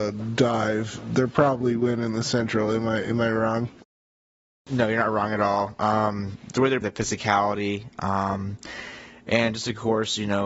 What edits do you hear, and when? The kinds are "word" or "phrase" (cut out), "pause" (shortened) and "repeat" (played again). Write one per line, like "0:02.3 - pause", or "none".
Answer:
0:06.5 - word
0:06.8 - word